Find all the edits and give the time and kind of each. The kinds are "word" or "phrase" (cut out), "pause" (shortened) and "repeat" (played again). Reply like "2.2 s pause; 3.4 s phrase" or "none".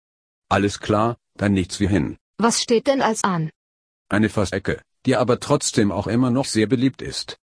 2.3 s pause; 3.2 s word; 4.5 s word